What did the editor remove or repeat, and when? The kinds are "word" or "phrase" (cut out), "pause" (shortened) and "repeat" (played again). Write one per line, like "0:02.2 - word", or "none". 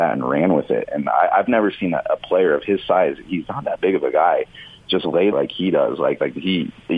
0:05.3 - phrase